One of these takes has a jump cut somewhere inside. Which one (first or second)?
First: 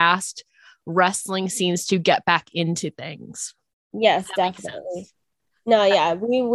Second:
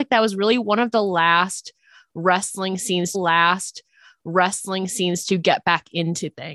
second